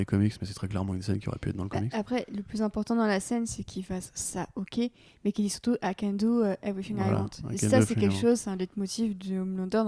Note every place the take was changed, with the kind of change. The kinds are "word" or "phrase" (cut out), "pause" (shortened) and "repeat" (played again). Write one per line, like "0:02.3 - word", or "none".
none